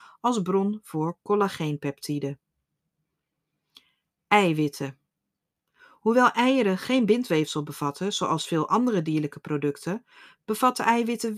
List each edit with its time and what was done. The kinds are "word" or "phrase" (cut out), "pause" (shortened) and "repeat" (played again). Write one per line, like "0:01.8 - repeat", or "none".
none